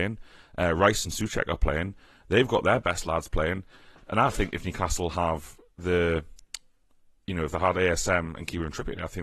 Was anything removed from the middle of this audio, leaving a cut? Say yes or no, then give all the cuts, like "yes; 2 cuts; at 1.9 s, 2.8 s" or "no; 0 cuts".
no; 0 cuts